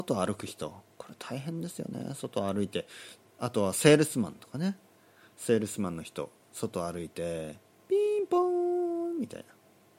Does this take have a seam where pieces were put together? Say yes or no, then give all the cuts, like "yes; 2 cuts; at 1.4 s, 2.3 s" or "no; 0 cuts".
no; 0 cuts